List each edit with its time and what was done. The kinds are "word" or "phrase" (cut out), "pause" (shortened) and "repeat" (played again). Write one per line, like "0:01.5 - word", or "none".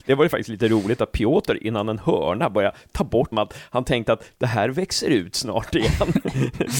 0:03.3 - phrase